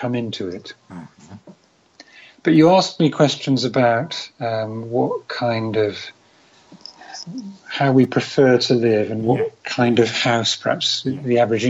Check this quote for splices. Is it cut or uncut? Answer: uncut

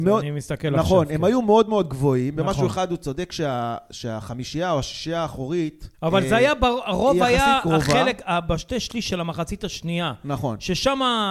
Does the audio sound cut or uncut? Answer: cut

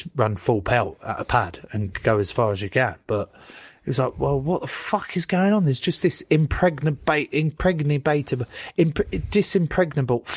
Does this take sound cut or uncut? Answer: uncut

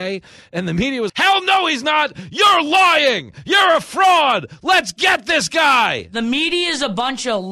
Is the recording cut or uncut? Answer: cut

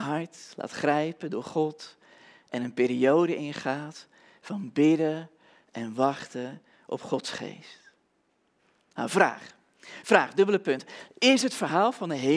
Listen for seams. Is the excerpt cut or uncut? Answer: uncut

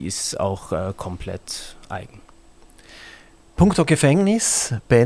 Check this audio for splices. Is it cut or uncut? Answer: uncut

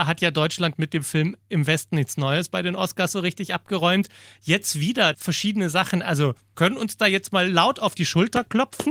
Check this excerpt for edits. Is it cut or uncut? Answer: cut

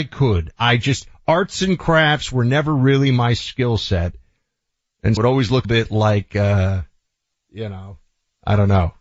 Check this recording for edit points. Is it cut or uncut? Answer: cut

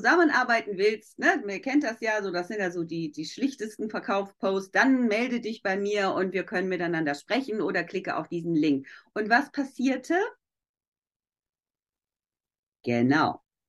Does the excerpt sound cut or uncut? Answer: uncut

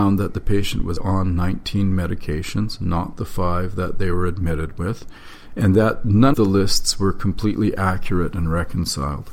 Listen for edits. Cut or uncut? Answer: cut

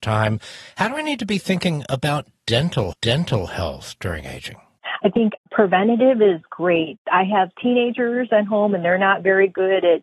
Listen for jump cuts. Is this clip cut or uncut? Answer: cut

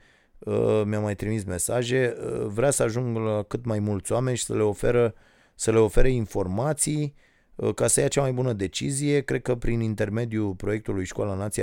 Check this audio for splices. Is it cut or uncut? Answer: uncut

